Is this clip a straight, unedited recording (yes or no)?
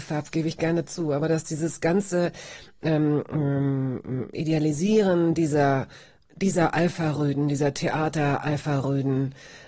yes